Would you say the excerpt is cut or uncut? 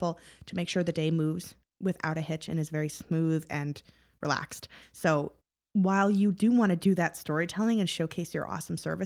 uncut